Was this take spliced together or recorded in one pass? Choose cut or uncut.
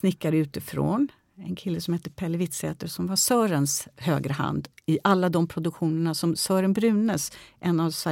uncut